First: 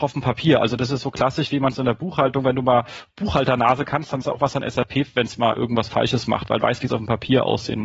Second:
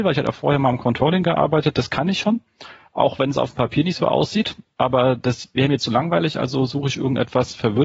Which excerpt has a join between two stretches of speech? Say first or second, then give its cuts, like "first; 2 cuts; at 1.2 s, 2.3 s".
first; 3 cuts; at 4.2 s, 5.1 s, 6.6 s